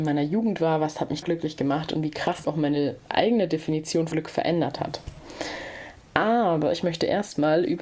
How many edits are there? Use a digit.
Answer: 3